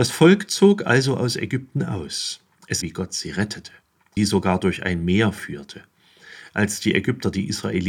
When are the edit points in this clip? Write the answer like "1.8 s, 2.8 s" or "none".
2.8 s, 4.2 s